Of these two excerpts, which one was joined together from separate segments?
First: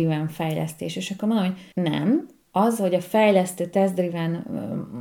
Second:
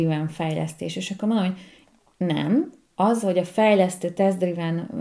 first; 1 cut; at 1.7 s

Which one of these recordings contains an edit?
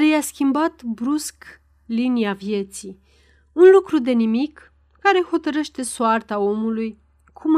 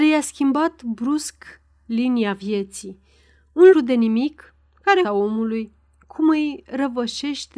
second; 2 cuts; at 3.7 s, 5.0 s

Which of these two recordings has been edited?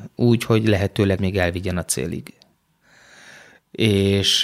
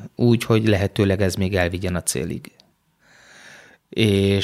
first; 1 cut; at 1.2 s

